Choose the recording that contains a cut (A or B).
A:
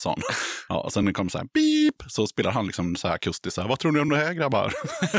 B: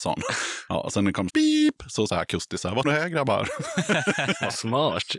B